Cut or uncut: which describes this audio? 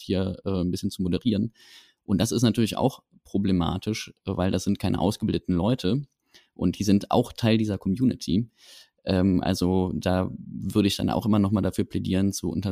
uncut